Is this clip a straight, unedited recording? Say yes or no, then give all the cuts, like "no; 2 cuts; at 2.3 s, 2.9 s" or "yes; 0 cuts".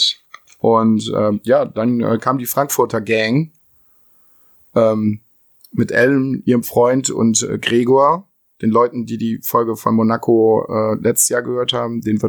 yes; 0 cuts